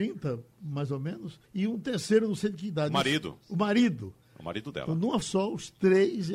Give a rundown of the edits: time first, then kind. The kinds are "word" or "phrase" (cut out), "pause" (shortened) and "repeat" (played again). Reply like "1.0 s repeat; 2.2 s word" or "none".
1.5 s pause; 3.4 s pause; 5.2 s word